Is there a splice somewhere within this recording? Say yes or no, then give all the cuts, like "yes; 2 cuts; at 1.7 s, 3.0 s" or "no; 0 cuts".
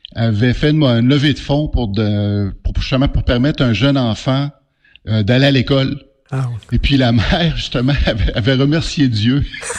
no; 0 cuts